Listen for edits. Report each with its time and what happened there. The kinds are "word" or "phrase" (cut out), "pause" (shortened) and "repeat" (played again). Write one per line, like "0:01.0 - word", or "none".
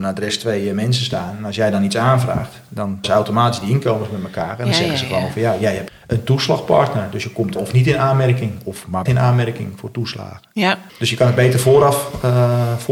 0:03.0 - word
0:05.9 - word
0:07.6 - word
0:09.1 - word
0:10.9 - pause